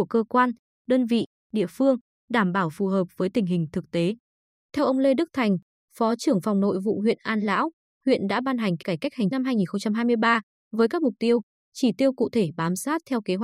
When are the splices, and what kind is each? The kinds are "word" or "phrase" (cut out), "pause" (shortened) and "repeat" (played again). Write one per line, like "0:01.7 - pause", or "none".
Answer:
0:08.8 - word
0:09.3 - word

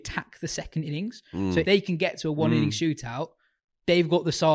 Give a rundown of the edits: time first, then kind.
0:01.6 - phrase

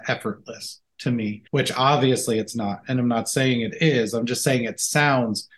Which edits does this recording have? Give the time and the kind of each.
0:01.5 - pause

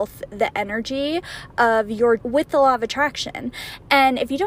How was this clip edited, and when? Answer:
0:02.2 - word

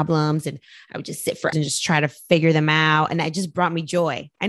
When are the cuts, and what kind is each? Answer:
0:01.5 - word

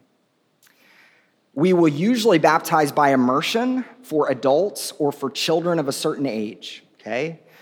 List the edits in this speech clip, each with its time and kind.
none

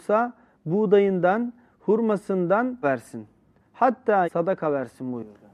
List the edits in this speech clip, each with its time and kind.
0:02.8 - word
0:04.2 - phrase

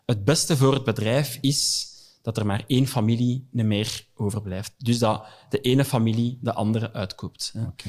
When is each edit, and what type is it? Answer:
none

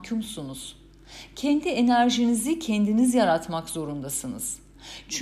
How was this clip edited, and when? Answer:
none

